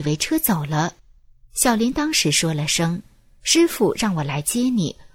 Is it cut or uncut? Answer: cut